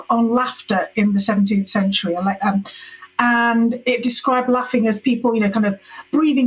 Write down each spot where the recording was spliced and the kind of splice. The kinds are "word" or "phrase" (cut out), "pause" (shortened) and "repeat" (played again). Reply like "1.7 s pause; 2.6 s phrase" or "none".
none